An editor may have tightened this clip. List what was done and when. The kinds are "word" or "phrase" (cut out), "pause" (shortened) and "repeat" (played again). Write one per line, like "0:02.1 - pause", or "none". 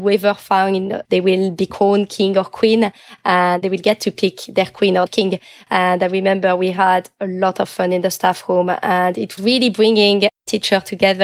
0:01.0 - word
0:03.6 - word
0:05.1 - word
0:09.4 - word